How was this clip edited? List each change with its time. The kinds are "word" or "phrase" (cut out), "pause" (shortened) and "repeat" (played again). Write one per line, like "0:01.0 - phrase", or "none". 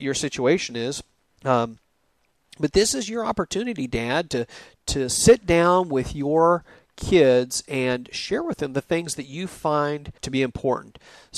0:10.2 - word